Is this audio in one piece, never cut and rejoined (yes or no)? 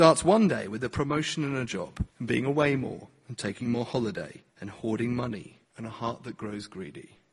no